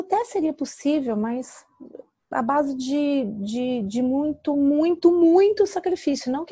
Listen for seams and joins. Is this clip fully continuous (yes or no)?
yes